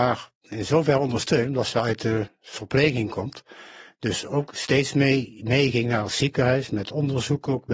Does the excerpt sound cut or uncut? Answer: uncut